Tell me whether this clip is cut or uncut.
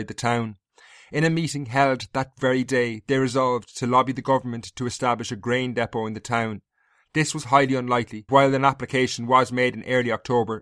cut